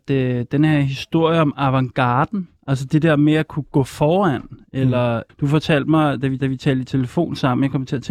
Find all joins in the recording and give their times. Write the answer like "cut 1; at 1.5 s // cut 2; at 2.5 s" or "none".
cut 1; at 2.6 s // cut 2; at 5.3 s // cut 3; at 6.4 s